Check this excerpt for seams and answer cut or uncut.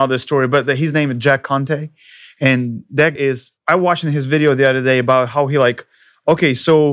cut